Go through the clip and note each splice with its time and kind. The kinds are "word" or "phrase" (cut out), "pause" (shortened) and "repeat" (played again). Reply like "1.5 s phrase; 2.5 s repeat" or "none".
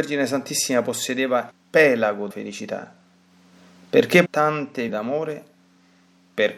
1.5 s word; 2.3 s word; 4.3 s word; 4.9 s word